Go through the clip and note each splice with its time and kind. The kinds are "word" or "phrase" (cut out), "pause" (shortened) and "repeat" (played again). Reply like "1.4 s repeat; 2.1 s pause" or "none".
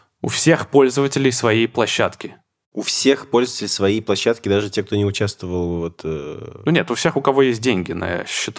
none